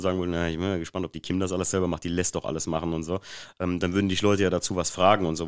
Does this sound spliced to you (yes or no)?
no